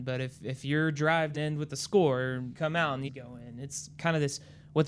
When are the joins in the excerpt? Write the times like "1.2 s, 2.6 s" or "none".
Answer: 1.3 s, 2.5 s, 3.1 s